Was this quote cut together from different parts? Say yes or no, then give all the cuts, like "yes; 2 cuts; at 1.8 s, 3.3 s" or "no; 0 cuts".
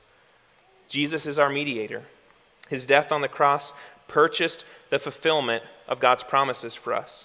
no; 0 cuts